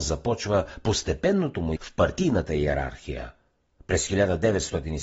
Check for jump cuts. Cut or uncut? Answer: cut